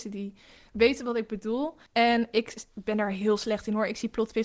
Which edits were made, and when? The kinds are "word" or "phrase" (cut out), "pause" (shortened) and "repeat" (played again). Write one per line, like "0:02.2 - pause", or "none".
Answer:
0:01.9 - pause